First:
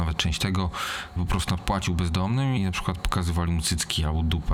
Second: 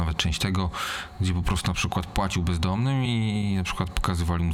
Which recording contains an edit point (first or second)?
first